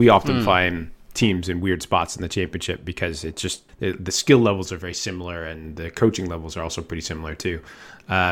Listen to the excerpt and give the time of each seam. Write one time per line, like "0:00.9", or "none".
0:03.7